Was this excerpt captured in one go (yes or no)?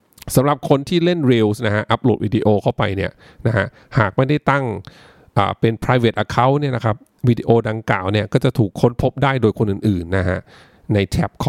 yes